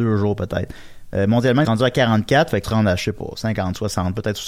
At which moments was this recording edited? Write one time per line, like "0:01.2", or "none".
0:01.6
0:02.6